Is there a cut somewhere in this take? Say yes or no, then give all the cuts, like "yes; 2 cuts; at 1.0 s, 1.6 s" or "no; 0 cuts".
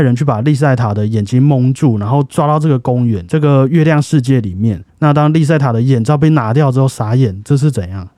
yes; 1 cut; at 4.9 s